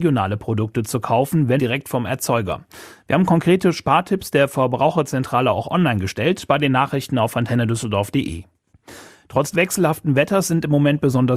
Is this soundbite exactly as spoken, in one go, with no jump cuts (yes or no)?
no